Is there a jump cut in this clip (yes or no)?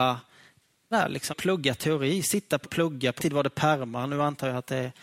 yes